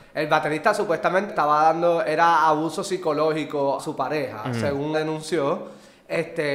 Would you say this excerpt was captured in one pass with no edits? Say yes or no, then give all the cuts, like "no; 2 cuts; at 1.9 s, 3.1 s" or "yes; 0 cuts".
no; 3 cuts; at 1.3 s, 3.8 s, 4.9 s